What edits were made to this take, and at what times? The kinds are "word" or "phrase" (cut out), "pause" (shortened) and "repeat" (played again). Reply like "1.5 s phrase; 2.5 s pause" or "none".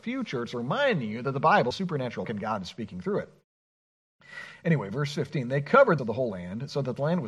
1.7 s phrase; 2.2 s word; 6.0 s phrase